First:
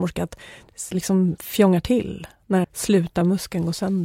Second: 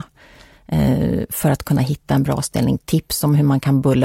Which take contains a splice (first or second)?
first